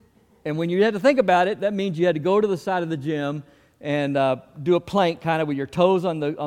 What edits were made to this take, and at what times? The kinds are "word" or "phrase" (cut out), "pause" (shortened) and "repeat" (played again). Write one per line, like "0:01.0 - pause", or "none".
none